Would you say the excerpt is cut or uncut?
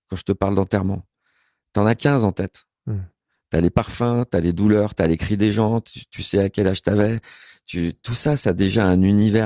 uncut